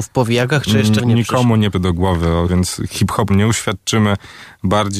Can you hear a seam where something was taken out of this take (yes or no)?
yes